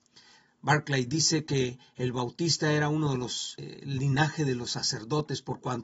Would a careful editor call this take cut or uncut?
uncut